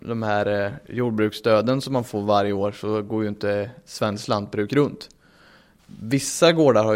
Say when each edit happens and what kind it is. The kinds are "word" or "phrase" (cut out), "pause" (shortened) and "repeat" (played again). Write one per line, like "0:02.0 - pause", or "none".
none